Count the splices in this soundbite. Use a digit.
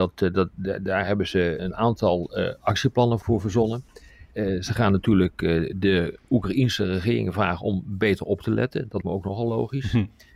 2